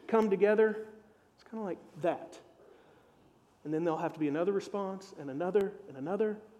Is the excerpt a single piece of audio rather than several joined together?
yes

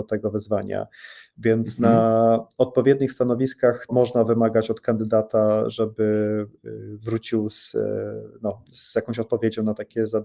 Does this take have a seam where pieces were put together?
yes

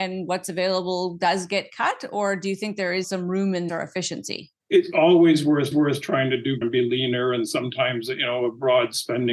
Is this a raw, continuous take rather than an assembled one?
no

